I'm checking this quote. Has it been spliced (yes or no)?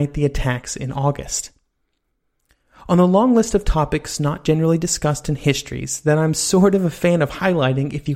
no